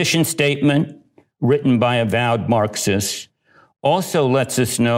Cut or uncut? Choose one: uncut